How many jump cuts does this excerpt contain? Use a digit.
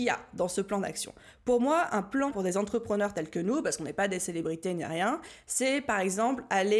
1